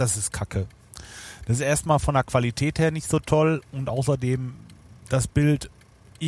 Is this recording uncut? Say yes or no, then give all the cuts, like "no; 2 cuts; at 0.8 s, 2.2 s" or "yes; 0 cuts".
yes; 0 cuts